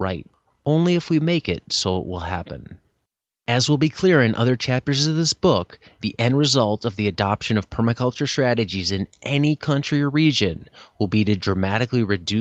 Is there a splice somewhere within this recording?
no; 0 cuts

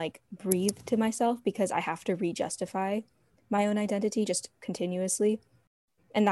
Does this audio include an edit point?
no; 0 cuts

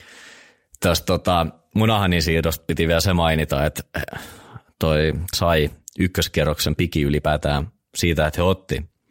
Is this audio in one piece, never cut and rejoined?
no; 1 cut; at 5.3 s

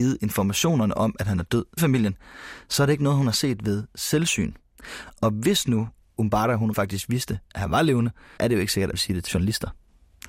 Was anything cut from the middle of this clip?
yes; 5 cuts; at 1.8 s, 6.7 s, 8.4 s, 8.9 s, 9.3 s

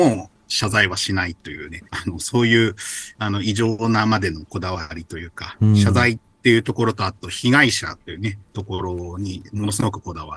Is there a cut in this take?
yes; 1 cut; at 1.9 s

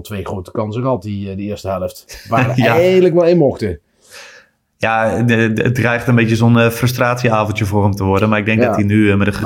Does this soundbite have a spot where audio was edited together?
no; 0 cuts

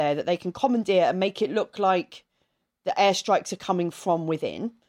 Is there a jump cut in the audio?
no; 0 cuts

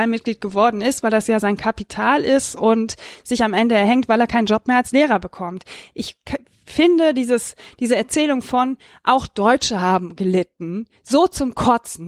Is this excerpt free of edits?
yes; 0 cuts

